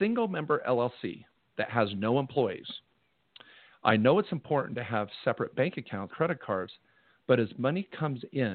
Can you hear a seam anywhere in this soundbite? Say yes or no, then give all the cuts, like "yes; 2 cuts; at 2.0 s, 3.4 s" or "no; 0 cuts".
yes; 1 cut; at 6.1 s